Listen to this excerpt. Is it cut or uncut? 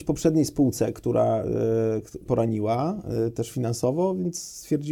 cut